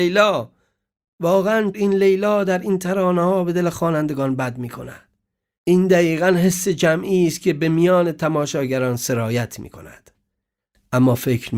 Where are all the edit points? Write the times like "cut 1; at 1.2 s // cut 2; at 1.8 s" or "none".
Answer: cut 1; at 1.7 s